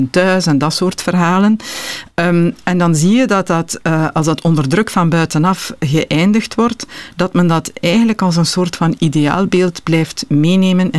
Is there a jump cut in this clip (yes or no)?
no